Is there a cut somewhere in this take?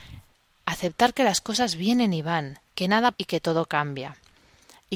yes; 2 cuts; at 2.7 s, 3.1 s

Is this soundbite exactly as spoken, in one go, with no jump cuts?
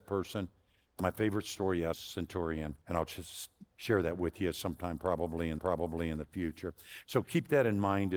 no; 3 cuts; at 1.9 s, 2.8 s, 5.6 s

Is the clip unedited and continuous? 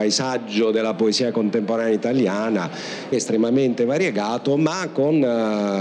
no; 1 cut; at 3.1 s

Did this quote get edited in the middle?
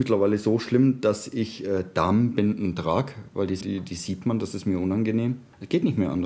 yes; 1 cut; at 3.6 s

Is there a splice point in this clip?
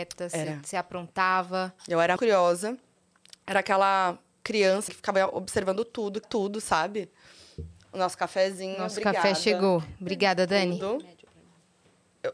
yes; 3 cuts; at 2.2 s, 4.9 s, 6.2 s

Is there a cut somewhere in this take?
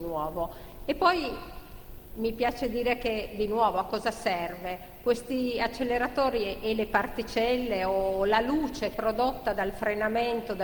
yes; 1 cut; at 8.9 s

